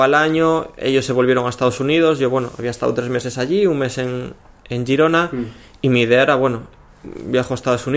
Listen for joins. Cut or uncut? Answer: uncut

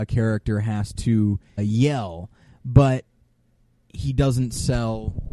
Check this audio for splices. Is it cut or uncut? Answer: cut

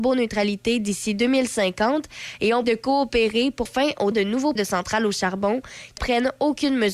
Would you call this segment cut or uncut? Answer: cut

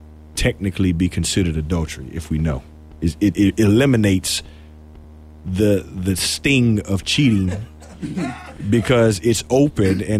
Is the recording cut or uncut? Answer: uncut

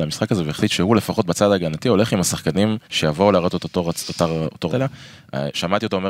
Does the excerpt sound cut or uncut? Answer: cut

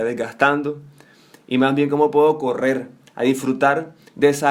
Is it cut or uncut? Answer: uncut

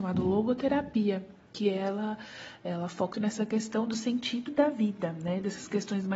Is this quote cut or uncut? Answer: cut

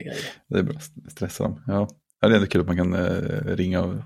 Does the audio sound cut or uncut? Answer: uncut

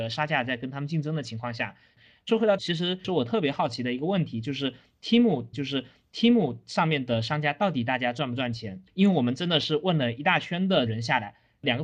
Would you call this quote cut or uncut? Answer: cut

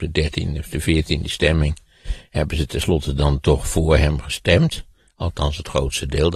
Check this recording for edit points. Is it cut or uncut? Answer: uncut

